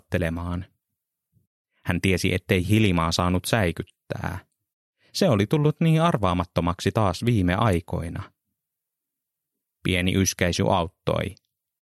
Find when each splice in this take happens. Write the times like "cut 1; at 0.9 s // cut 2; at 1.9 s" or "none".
none